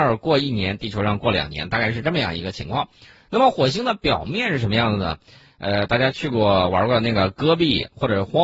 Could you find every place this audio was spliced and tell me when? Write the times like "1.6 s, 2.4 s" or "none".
none